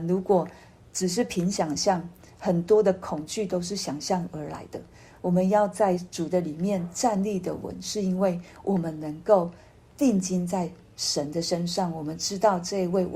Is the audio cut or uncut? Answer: uncut